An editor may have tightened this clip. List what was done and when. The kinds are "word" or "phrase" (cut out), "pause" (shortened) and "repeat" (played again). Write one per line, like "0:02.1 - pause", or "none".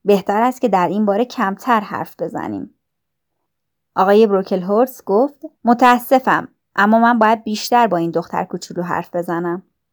0:05.5 - pause